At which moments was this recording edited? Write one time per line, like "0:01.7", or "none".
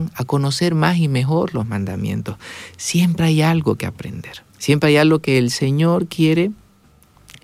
0:04.5